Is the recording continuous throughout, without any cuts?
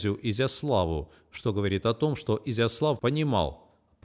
yes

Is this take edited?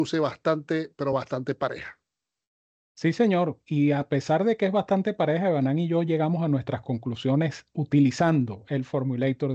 no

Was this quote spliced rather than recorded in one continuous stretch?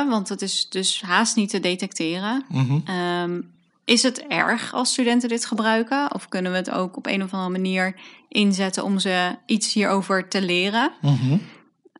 no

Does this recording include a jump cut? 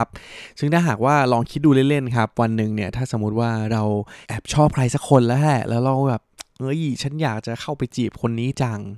yes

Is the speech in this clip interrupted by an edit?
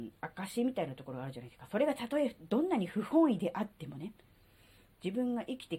no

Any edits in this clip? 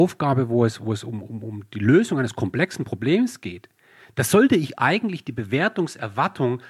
no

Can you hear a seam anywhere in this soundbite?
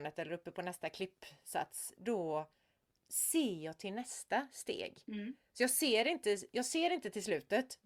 no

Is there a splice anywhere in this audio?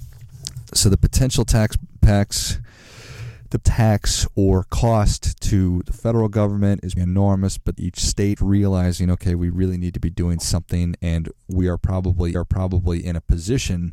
yes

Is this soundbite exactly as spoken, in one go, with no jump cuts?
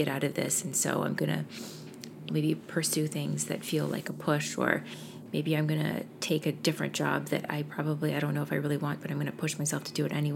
no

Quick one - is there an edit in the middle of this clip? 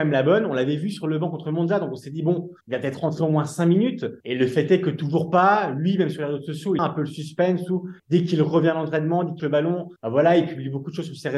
yes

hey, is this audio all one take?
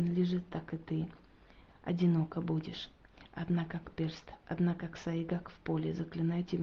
yes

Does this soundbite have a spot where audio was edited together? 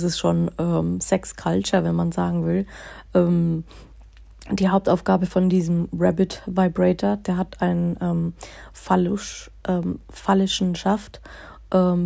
no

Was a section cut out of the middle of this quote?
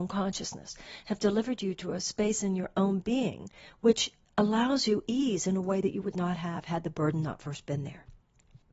no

